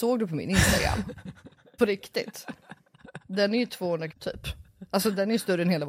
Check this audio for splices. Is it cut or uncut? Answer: cut